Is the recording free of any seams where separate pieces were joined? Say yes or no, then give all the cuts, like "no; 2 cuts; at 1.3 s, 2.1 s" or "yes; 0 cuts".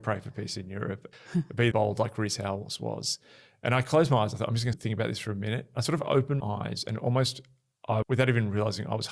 no; 5 cuts; at 1.1 s, 1.7 s, 4.7 s, 6.4 s, 8.0 s